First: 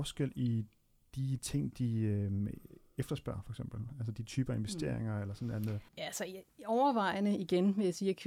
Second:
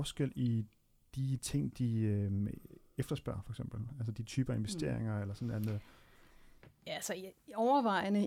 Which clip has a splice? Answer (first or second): first